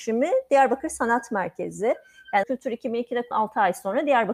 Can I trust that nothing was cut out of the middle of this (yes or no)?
no